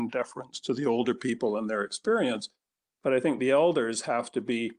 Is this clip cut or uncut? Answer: uncut